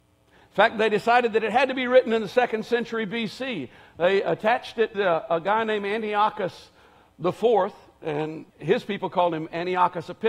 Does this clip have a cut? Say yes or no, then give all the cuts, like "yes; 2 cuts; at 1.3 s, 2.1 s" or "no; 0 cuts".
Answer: yes; 2 cuts; at 4.9 s, 8.5 s